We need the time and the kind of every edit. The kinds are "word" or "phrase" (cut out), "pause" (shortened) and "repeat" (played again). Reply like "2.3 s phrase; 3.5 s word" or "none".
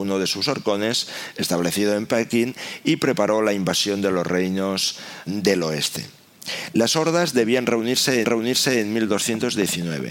5.3 s word; 8.2 s repeat